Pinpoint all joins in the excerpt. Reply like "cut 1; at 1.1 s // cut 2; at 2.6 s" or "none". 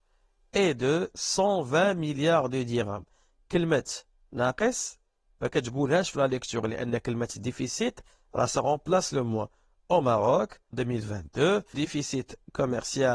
cut 1; at 10.7 s // cut 2; at 11.7 s